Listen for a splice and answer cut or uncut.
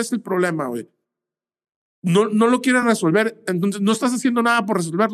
uncut